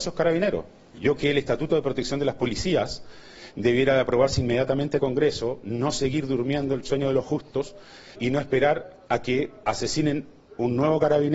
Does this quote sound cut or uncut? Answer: cut